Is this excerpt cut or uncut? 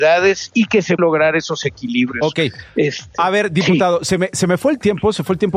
cut